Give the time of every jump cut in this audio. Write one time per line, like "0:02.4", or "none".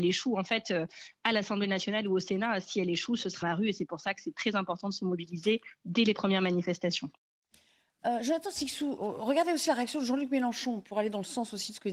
0:03.4
0:09.0